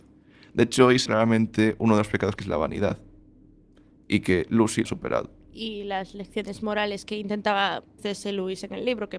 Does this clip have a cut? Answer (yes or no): yes